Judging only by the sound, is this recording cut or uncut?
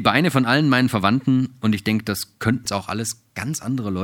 cut